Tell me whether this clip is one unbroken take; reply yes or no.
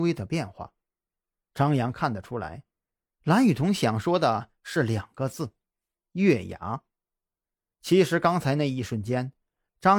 yes